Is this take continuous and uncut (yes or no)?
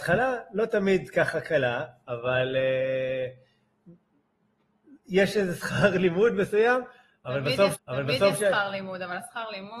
no